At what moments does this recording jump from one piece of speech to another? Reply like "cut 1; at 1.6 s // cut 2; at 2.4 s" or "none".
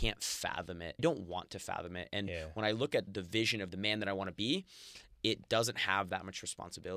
cut 1; at 1.0 s // cut 2; at 3.1 s